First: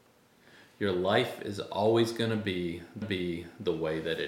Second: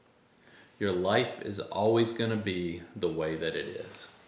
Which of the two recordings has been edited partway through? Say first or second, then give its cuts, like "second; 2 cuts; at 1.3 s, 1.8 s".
first; 1 cut; at 3.0 s